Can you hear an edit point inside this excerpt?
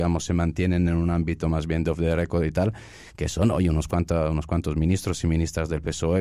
no; 0 cuts

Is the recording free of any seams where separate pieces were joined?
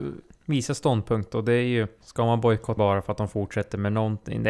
no; 1 cut; at 2.8 s

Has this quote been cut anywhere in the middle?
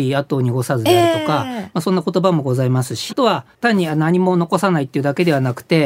yes; 1 cut; at 3.1 s

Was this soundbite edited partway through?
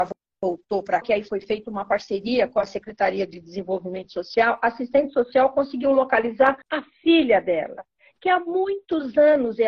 yes; 2 cuts; at 1.0 s, 6.6 s

